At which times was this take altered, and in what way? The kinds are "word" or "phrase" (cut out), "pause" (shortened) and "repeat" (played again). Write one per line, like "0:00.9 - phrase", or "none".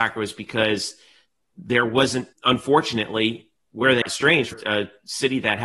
0:02.3 - pause
0:04.0 - word
0:04.5 - word